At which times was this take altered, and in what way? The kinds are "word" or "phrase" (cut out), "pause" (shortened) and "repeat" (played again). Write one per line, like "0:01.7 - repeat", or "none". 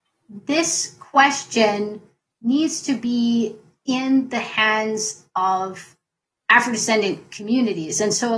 none